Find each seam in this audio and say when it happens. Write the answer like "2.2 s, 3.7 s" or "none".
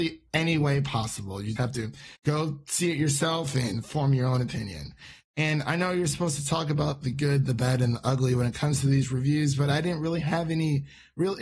1.6 s, 2.2 s